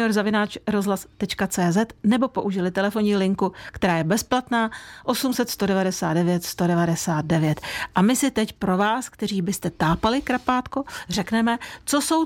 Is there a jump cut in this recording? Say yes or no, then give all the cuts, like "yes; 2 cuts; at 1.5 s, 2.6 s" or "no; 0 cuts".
no; 0 cuts